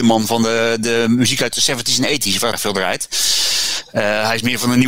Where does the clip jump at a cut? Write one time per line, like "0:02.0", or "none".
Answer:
0:02.5